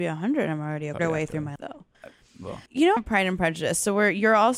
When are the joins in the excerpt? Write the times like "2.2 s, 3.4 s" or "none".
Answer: 1.0 s, 1.6 s, 1.9 s, 2.7 s, 3.0 s